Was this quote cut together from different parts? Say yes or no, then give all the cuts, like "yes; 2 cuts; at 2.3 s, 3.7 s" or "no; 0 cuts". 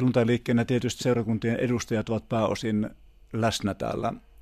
yes; 1 cut; at 1.0 s